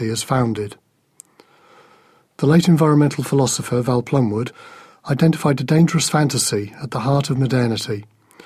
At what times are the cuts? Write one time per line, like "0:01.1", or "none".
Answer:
none